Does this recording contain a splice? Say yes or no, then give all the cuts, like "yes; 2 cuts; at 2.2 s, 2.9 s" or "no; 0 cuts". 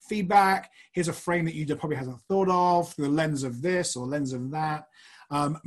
no; 0 cuts